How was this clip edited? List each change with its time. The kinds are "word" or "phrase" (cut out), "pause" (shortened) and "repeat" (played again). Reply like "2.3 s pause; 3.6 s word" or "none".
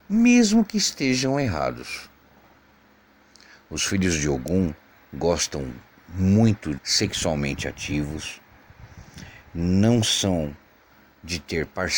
4.9 s pause; 6.8 s word